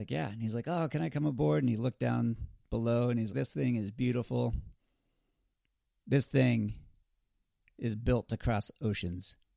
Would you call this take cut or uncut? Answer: cut